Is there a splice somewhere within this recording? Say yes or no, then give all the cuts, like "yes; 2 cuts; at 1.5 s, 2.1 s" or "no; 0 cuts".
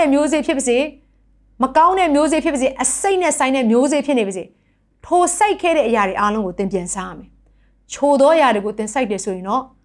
no; 0 cuts